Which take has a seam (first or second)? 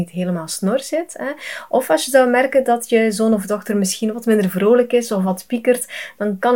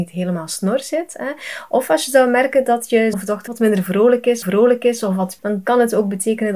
second